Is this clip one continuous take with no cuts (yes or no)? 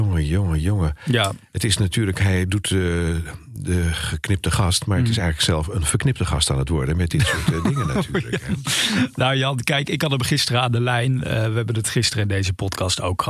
yes